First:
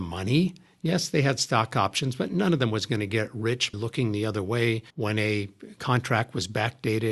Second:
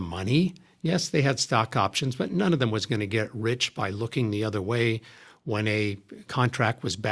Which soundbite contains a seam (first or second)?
first